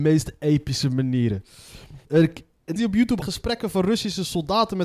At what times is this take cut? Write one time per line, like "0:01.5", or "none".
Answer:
0:02.0
0:02.8
0:03.2